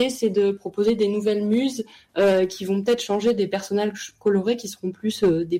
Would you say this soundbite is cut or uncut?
uncut